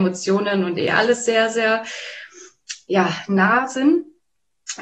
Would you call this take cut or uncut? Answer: uncut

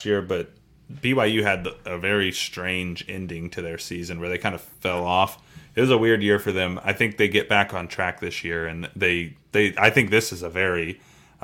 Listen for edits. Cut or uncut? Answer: cut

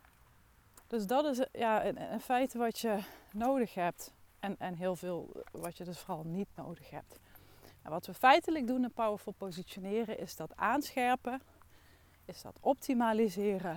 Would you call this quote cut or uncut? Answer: uncut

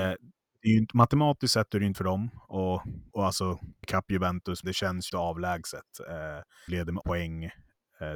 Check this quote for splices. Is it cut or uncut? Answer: cut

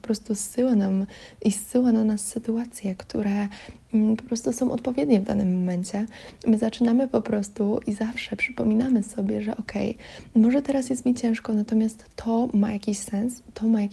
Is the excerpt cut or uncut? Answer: uncut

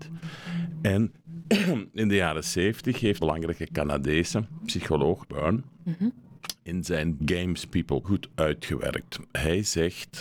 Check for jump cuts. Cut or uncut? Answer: cut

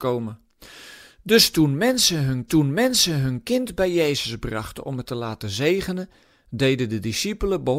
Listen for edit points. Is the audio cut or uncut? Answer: cut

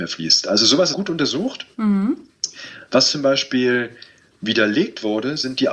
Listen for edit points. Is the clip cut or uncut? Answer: cut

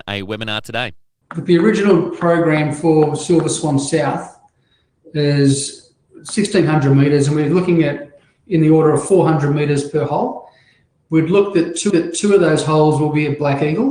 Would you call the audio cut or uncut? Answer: cut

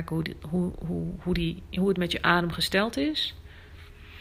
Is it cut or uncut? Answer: uncut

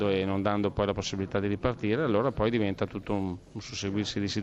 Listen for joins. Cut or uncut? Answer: uncut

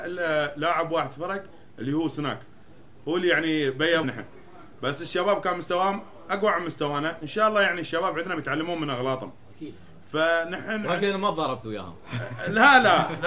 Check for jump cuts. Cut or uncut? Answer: cut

